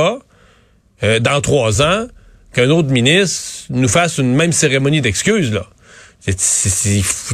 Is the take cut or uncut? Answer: uncut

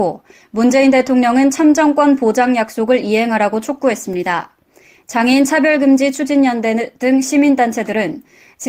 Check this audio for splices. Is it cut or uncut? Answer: uncut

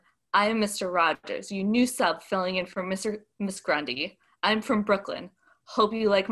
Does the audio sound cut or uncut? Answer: uncut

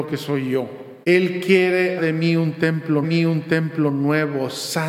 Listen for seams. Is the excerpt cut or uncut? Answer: cut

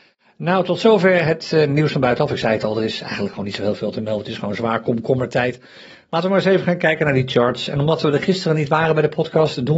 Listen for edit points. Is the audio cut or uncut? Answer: uncut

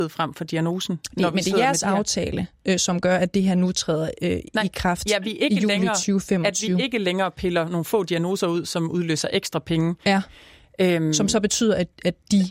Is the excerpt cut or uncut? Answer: uncut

